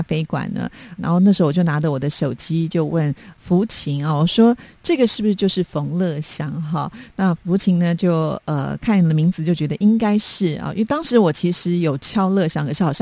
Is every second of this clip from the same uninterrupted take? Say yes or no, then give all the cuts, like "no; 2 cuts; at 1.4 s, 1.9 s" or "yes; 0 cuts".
no; 1 cut; at 1.0 s